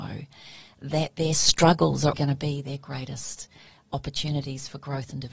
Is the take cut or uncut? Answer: cut